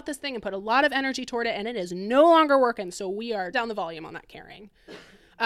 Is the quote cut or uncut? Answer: cut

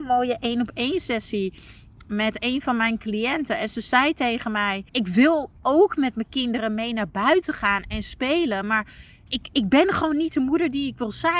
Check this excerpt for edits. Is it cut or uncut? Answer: cut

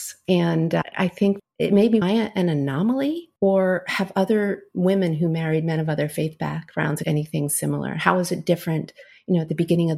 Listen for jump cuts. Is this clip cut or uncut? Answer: cut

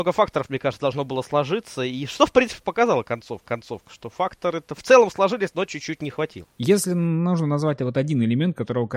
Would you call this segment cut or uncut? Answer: cut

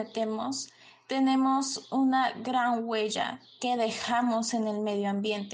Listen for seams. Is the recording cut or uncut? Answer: uncut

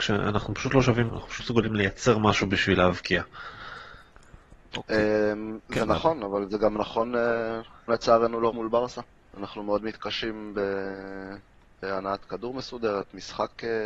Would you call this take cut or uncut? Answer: cut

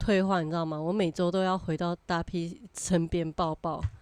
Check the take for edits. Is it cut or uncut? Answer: uncut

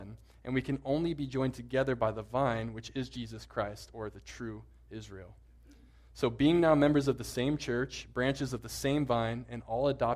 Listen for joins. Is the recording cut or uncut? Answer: uncut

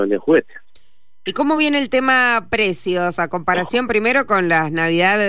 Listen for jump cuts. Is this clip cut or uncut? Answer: uncut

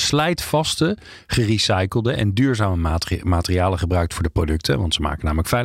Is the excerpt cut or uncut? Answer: uncut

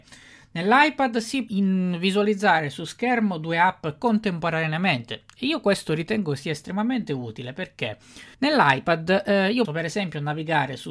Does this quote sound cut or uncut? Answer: cut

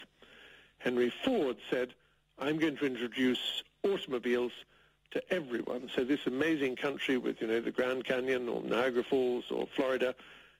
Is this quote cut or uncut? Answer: uncut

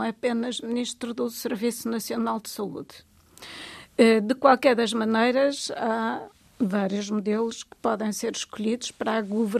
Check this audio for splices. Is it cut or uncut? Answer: uncut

